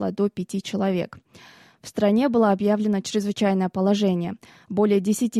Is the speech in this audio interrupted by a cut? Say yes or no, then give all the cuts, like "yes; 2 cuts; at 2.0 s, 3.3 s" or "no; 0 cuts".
no; 0 cuts